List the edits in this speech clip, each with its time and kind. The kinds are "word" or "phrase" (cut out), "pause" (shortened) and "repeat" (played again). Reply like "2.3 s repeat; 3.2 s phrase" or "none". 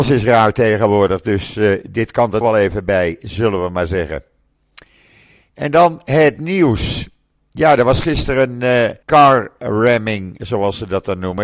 2.4 s phrase; 9.0 s pause